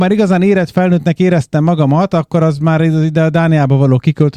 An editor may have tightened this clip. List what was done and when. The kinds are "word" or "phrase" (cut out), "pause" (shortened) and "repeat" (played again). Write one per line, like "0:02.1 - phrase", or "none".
none